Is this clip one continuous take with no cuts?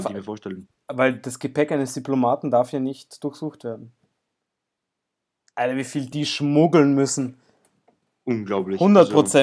yes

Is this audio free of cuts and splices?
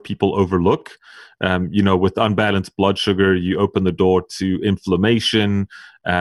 yes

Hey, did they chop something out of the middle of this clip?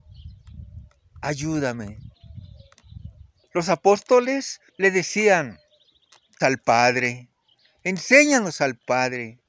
yes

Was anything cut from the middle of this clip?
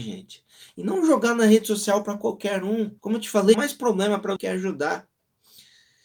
yes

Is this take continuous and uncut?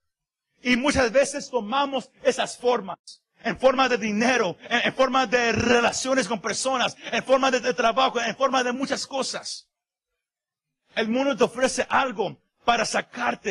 yes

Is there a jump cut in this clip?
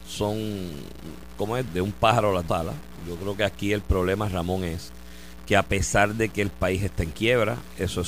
yes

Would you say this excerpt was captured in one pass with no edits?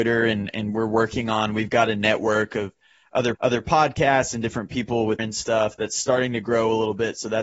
no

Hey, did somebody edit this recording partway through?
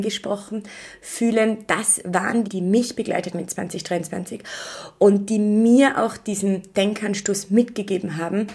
yes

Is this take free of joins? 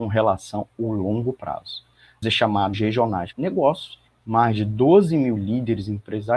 no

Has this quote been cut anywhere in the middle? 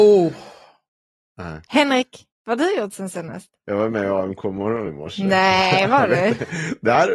yes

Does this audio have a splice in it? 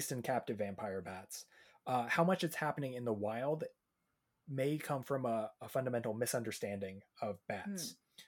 no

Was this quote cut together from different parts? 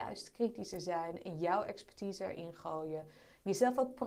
no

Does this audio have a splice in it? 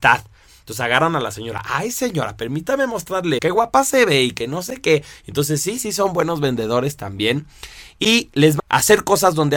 yes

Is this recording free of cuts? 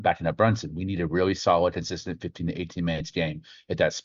yes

